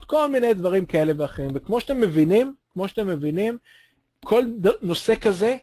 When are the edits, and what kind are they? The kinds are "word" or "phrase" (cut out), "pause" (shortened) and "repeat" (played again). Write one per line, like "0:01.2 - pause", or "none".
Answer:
none